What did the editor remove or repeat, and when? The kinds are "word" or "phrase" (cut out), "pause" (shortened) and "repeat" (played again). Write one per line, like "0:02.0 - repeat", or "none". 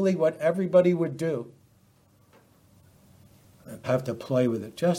0:03.8 - word